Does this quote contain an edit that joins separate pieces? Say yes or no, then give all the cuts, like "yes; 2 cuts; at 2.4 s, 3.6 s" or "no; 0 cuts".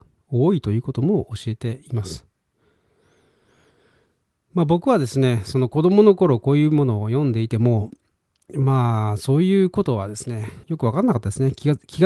yes; 1 cut; at 10.6 s